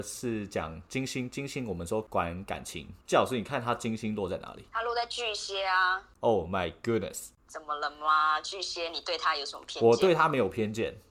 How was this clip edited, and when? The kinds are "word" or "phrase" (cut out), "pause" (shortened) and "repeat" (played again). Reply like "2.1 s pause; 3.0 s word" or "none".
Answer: 3.0 s pause